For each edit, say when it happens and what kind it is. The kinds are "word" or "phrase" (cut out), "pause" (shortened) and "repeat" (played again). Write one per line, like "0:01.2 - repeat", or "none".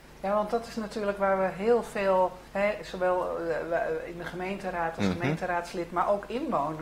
0:02.5 - pause

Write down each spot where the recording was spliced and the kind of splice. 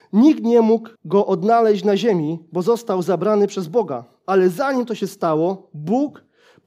0:01.0 - pause

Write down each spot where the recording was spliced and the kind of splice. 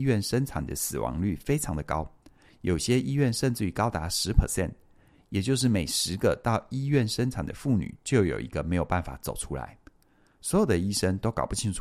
none

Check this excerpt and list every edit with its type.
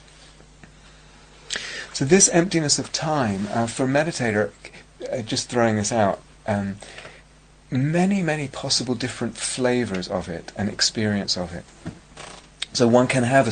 none

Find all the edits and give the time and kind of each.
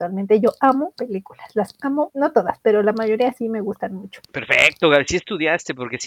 0:00.9 - word
0:02.1 - word
0:04.2 - pause

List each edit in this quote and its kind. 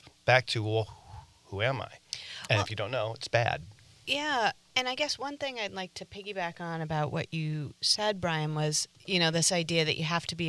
none

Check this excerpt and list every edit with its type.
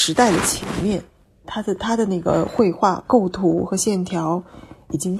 none

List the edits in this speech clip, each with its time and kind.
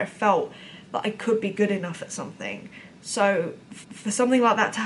0:03.8 - repeat

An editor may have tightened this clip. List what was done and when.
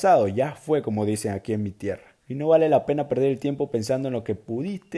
0:02.2 - pause

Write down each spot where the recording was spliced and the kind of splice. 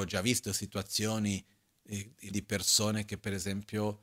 0:02.3 - word

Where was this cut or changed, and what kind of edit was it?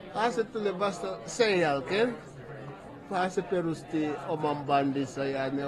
none

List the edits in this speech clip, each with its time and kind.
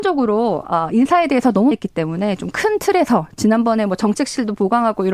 0:01.7 - phrase

